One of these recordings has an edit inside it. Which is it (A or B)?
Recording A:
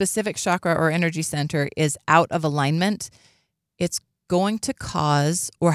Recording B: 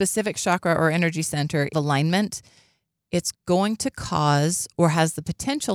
B